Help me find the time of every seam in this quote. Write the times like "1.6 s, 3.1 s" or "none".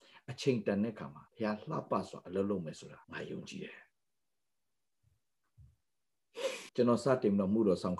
1.3 s, 3.0 s, 6.7 s